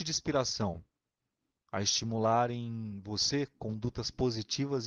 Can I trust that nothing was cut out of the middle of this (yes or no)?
yes